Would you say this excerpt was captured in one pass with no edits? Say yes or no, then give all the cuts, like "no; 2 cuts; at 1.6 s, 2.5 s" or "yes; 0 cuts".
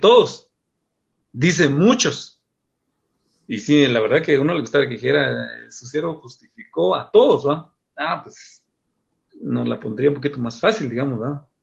yes; 0 cuts